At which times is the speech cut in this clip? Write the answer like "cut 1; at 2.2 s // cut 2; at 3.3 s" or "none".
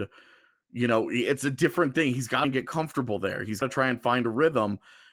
cut 1; at 2.4 s // cut 2; at 3.6 s